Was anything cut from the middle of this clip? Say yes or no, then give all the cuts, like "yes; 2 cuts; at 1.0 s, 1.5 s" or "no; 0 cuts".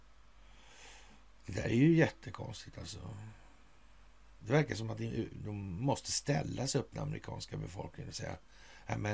no; 0 cuts